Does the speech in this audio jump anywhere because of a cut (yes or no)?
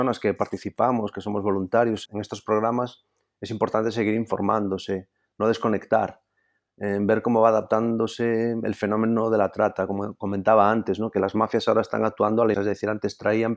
yes